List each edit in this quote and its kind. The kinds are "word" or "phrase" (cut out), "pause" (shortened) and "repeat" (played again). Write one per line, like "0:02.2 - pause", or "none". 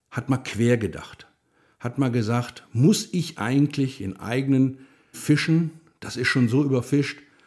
0:05.1 - word